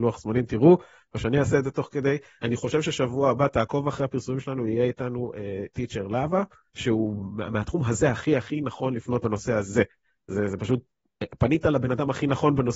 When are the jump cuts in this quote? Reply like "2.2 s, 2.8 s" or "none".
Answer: 6.7 s, 8.4 s, 9.2 s